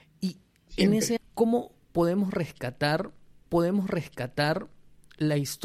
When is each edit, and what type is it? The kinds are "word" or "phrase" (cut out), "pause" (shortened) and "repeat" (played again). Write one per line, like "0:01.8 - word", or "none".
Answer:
0:01.2 - word
0:03.4 - repeat

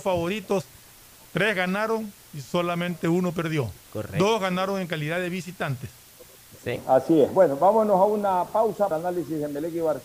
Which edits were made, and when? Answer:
0:08.9 - phrase

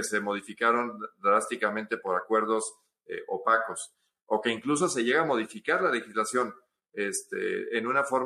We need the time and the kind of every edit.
none

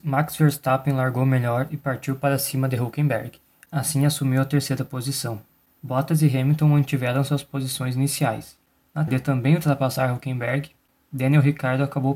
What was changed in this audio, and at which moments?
0:09.1 - word

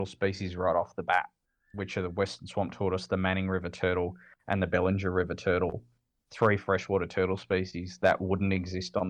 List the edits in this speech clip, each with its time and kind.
none

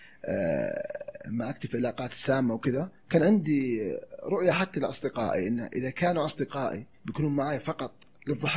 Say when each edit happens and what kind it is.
0:03.0 - pause
0:06.9 - pause

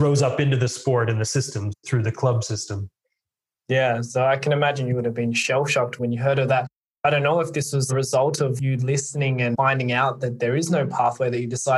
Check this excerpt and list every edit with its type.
none

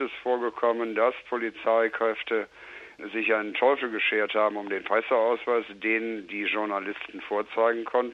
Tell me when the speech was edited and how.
none

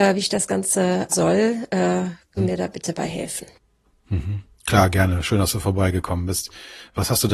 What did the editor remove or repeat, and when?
0:01.1 - word
0:02.4 - word
0:04.5 - pause

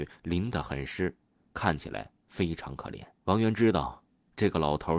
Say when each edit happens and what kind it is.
0:02.2 - pause
0:03.1 - pause

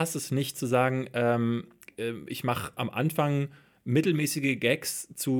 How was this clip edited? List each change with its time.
none

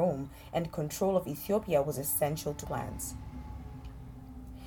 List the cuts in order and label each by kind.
0:02.6 - word

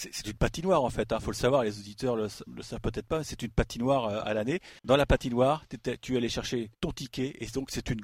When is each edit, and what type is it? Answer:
0:02.5 - word
0:04.8 - pause
0:06.7 - pause

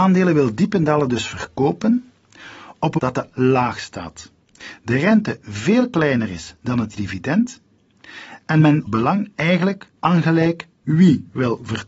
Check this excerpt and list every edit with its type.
0:03.0 - word
0:03.3 - word
0:06.9 - word
0:08.9 - word
0:10.0 - pause

